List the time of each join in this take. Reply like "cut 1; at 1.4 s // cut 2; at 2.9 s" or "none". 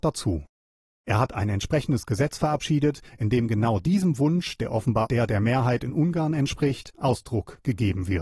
cut 1; at 5.1 s

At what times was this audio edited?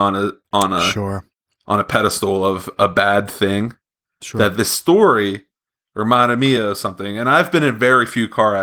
none

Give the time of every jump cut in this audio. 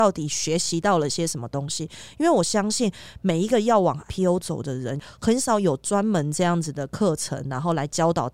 cut 1; at 4.1 s

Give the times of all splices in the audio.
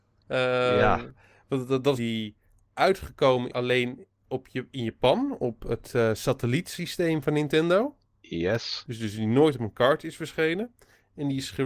cut 1; at 2.0 s // cut 2; at 3.5 s

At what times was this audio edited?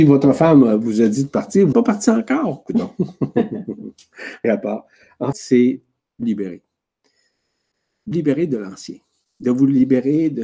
cut 1; at 1.7 s // cut 2; at 4.4 s // cut 3; at 5.3 s // cut 4; at 6.2 s // cut 5; at 8.1 s

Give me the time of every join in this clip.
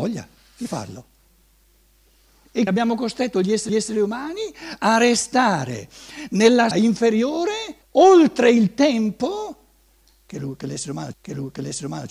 cut 1; at 2.7 s // cut 2; at 3.7 s // cut 3; at 6.7 s // cut 4; at 7.8 s // cut 5; at 11.1 s

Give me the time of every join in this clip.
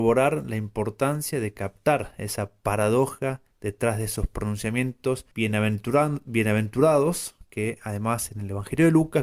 cut 1; at 3.5 s // cut 2; at 5.3 s

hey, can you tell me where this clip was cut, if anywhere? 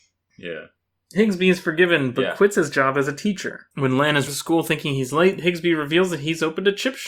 cut 1; at 3.7 s // cut 2; at 4.3 s

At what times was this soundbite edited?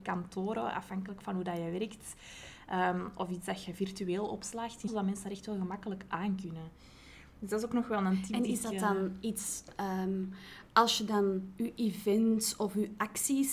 cut 1; at 4.9 s

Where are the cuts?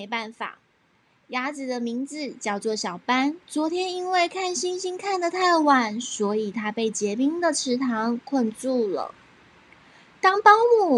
cut 1; at 3.4 s

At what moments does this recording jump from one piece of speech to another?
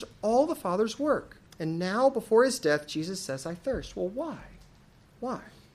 cut 1; at 1.5 s

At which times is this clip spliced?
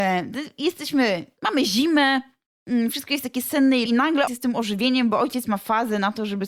cut 1; at 3.9 s // cut 2; at 4.3 s

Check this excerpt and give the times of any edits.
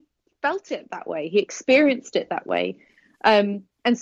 none

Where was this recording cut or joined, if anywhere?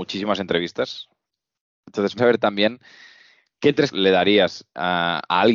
cut 1; at 2.2 s // cut 2; at 3.9 s

